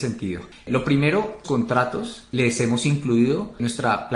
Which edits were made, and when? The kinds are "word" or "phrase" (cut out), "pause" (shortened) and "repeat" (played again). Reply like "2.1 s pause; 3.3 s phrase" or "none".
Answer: 1.4 s phrase; 2.3 s word